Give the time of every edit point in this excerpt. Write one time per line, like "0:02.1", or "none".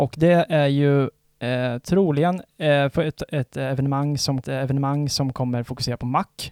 0:01.2
0:04.4